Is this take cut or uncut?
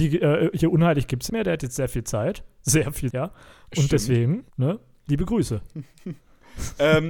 cut